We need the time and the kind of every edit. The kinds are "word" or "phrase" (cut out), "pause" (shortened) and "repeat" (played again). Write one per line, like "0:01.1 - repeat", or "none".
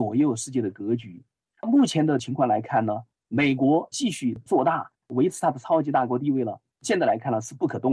none